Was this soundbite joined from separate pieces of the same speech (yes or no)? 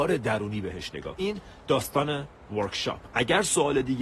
yes